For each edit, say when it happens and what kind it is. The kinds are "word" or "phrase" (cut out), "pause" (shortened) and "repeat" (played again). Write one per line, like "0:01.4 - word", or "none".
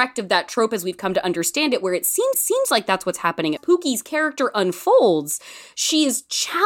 0:02.3 - repeat
0:03.6 - phrase